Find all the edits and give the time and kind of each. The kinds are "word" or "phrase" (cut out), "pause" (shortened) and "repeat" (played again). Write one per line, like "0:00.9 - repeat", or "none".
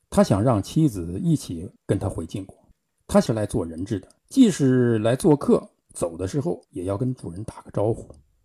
0:01.8 - pause
0:02.7 - pause
0:04.2 - pause
0:05.8 - pause
0:06.6 - pause